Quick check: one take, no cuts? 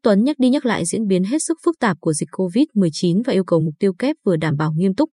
yes; 0 cuts

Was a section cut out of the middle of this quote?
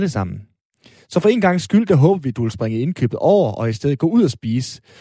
no; 0 cuts

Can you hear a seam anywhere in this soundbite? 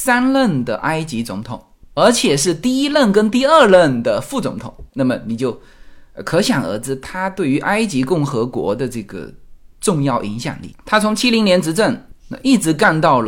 no; 0 cuts

